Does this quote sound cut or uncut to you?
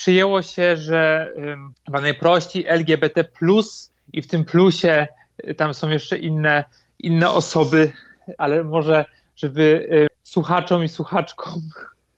cut